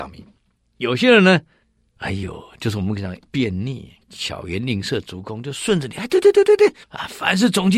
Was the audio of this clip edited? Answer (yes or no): yes